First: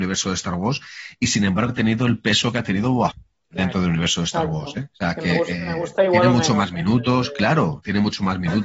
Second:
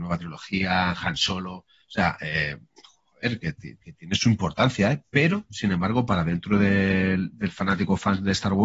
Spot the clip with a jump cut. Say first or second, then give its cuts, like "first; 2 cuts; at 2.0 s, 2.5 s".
first; 3 cuts; at 1.7 s, 3.1 s, 4.9 s